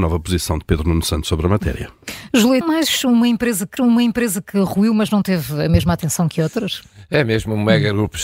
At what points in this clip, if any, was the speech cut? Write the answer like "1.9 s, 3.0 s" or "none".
2.6 s, 3.8 s